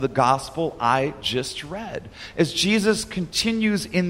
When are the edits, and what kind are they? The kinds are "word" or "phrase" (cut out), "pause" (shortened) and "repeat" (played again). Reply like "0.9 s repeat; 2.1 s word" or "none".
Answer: none